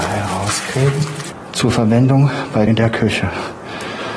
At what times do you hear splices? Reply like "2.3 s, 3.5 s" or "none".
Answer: 2.7 s